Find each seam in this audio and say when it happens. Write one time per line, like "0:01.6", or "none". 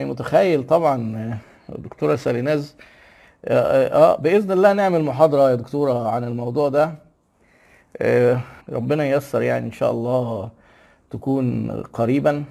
0:08.6

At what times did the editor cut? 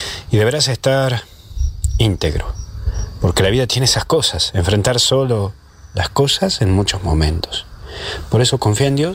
none

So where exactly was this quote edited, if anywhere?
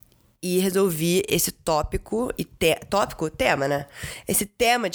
none

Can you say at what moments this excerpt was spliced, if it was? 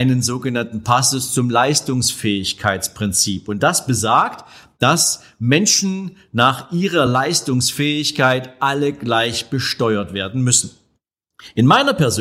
none

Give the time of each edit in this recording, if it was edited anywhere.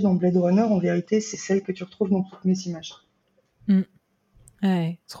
none

